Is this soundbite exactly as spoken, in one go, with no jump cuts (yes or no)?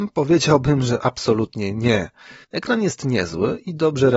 no